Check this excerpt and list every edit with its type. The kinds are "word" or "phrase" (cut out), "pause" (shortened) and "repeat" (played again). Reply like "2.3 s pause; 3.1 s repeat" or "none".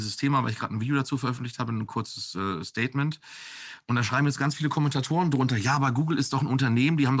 none